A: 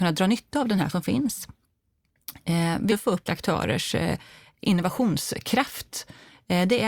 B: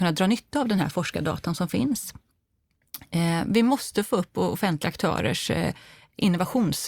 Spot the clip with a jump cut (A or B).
A